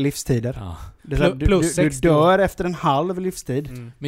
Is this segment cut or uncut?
cut